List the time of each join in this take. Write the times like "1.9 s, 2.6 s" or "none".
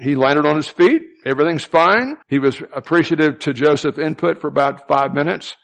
2.2 s